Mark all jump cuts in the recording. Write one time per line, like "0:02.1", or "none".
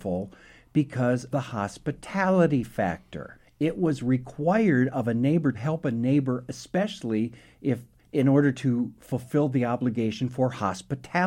0:01.3
0:05.5
0:06.5